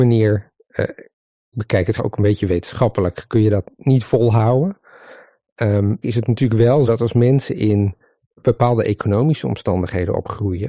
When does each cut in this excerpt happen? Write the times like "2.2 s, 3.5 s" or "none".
1.5 s, 2.0 s, 6.0 s, 6.9 s, 8.2 s